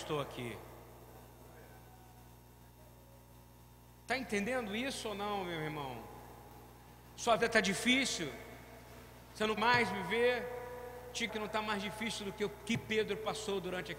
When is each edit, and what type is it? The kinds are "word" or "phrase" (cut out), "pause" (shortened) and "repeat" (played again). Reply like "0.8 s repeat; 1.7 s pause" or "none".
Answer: 7.4 s word; 9.6 s word; 11.3 s word